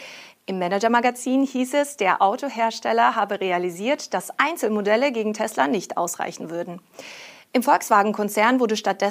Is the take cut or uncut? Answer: uncut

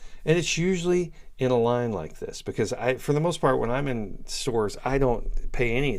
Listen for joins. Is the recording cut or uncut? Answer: uncut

